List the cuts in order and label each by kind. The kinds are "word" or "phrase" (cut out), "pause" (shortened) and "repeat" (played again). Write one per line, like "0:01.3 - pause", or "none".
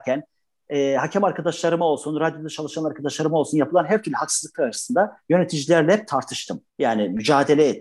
0:06.7 - pause